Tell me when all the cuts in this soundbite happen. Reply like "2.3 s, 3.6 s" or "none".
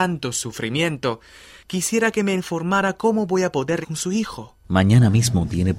3.8 s